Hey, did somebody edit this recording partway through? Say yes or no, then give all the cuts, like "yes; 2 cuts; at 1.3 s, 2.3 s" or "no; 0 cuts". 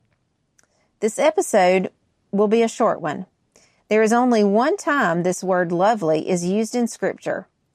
no; 0 cuts